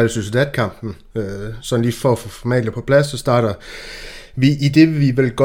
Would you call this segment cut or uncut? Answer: uncut